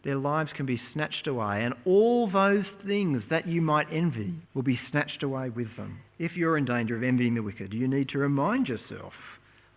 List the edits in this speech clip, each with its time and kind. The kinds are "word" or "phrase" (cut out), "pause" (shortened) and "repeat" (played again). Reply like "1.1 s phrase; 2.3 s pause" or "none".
4.5 s pause; 6.1 s pause